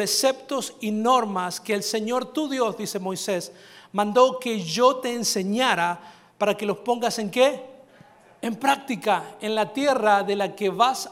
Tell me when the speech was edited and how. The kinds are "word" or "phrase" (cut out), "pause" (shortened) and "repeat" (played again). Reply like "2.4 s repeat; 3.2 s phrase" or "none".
none